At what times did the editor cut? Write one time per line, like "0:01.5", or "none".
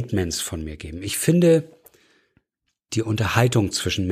none